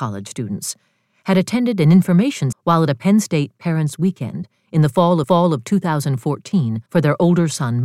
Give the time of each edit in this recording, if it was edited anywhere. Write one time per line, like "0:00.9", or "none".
0:02.5
0:05.2
0:06.9